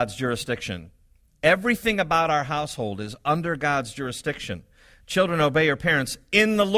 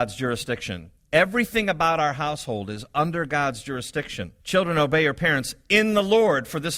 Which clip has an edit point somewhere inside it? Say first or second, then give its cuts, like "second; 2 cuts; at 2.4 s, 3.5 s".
second; 2 cuts; at 1.0 s, 4.4 s